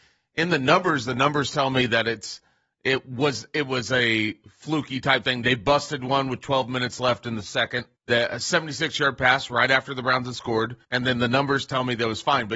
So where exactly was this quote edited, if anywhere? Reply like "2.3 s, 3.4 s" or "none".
8.0 s, 10.8 s

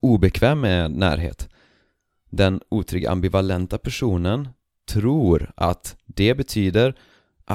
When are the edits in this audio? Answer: none

